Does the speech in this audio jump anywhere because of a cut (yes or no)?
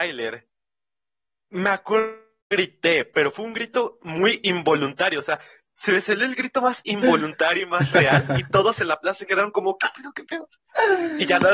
no